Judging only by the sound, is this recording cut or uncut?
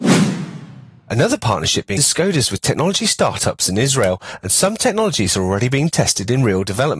cut